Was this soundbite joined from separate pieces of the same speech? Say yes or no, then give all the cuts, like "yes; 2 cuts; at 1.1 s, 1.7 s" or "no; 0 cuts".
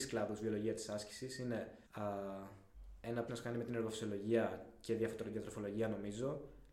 yes; 2 cuts; at 1.9 s, 3.3 s